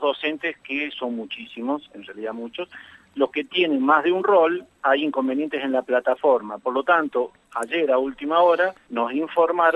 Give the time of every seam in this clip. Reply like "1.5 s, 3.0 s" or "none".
none